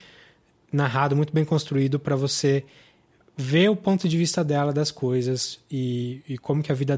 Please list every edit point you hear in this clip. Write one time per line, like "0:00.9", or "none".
none